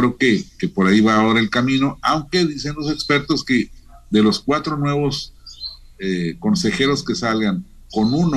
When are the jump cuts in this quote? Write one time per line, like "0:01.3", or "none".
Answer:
none